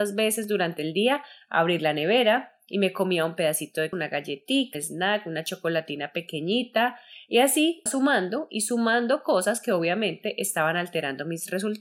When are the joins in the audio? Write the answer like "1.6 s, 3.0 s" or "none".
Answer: 3.9 s, 4.7 s, 7.9 s